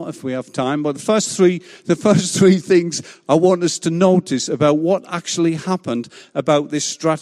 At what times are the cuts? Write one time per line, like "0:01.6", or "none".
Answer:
none